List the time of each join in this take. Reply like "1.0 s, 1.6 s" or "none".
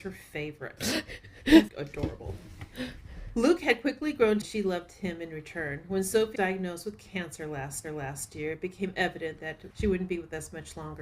1.7 s, 4.4 s, 6.4 s, 7.8 s